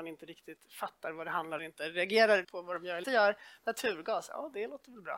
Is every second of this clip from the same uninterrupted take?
no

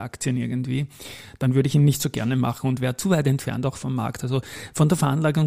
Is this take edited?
no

